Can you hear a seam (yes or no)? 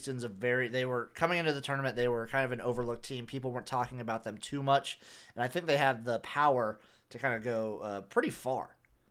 no